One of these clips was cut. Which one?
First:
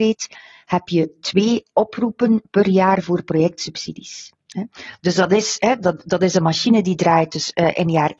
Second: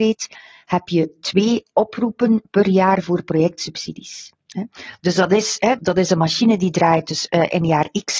second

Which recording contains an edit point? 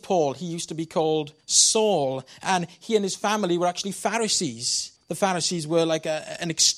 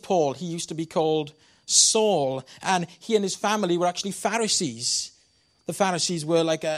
first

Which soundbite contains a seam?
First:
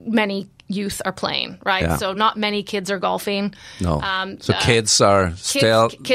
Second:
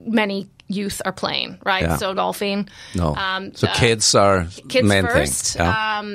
second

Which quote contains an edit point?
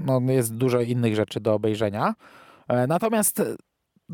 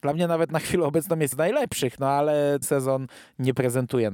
second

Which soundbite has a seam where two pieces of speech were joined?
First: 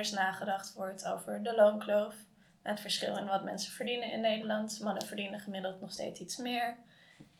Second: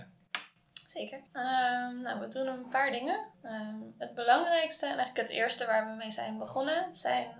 second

